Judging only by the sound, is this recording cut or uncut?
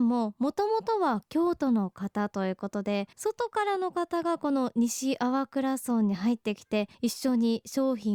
cut